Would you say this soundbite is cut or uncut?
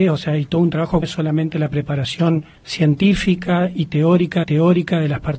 cut